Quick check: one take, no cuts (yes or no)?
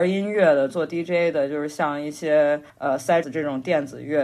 no